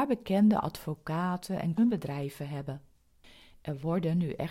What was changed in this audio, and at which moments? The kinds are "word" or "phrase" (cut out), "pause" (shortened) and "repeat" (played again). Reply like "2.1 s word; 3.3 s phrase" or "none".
1.8 s word